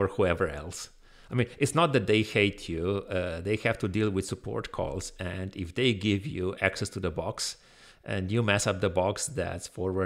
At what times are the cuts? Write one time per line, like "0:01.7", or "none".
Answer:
none